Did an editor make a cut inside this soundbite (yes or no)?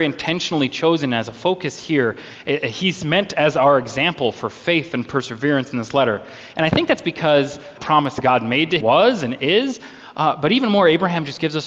yes